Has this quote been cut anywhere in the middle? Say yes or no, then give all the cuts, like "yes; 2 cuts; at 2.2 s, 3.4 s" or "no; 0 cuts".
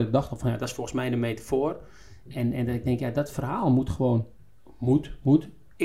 no; 0 cuts